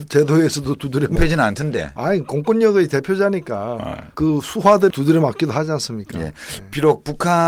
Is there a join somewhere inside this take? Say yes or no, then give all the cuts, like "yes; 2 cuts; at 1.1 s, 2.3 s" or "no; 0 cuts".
yes; 3 cuts; at 1.2 s, 4.1 s, 4.9 s